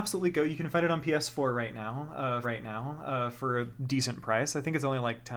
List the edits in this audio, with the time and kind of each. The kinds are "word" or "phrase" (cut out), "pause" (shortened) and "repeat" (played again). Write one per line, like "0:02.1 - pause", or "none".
0:02.4 - repeat
0:03.8 - pause